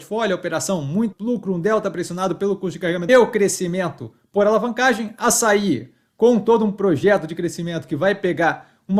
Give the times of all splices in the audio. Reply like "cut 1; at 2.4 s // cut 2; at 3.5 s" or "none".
cut 1; at 1.1 s // cut 2; at 3.1 s